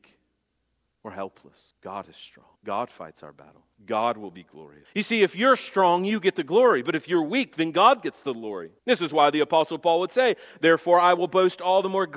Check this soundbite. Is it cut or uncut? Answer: cut